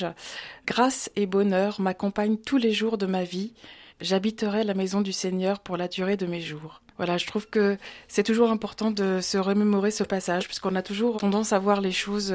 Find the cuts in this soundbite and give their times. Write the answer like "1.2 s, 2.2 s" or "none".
3.9 s, 6.9 s, 11.1 s